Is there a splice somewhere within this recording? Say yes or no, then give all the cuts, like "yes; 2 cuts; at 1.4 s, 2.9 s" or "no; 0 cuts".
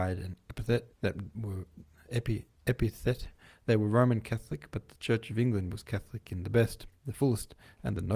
yes; 2 cuts; at 0.9 s, 2.5 s